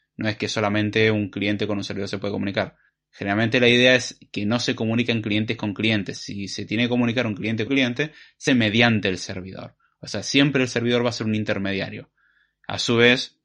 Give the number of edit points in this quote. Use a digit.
3